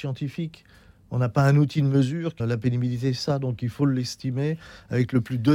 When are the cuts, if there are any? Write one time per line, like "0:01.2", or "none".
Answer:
0:02.4